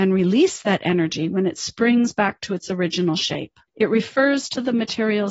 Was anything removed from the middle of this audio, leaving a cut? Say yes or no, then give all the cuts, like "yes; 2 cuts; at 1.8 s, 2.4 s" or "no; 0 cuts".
yes; 1 cut; at 3.7 s